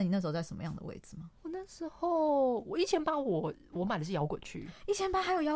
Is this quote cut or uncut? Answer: cut